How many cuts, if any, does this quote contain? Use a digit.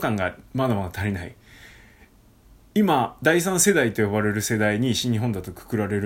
0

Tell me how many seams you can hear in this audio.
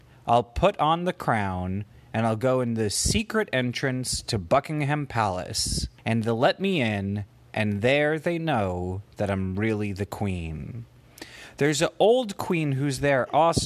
1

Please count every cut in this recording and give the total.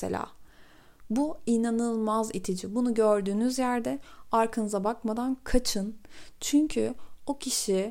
0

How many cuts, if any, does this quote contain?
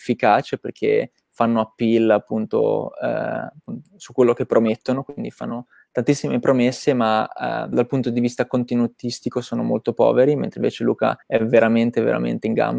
3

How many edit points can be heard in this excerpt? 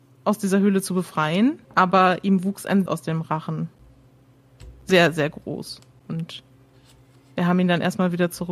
2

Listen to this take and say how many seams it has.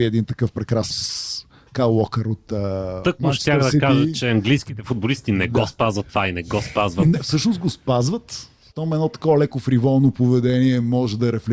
1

